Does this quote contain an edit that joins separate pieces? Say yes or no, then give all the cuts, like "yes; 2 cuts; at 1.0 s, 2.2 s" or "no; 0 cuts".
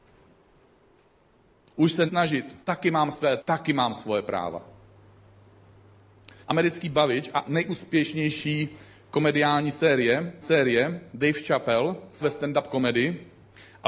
yes; 7 cuts; at 2.1 s, 2.6 s, 3.4 s, 6.4 s, 7.4 s, 10.4 s, 12.2 s